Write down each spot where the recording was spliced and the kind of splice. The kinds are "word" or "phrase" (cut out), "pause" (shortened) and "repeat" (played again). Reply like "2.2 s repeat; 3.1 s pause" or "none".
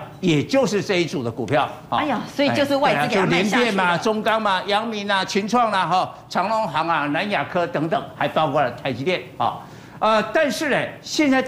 none